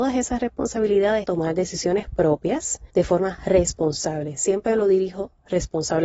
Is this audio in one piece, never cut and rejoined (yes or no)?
no